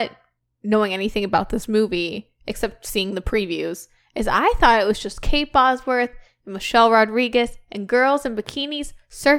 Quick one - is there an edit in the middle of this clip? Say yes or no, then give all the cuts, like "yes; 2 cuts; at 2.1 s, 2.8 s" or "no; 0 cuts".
no; 0 cuts